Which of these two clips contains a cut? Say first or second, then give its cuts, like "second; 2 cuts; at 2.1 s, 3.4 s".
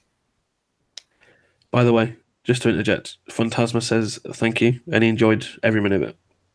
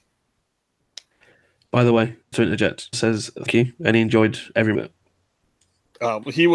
second; 4 cuts; at 2.3 s, 2.9 s, 3.5 s, 4.7 s